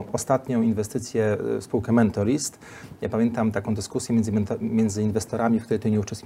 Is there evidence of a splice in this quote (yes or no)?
no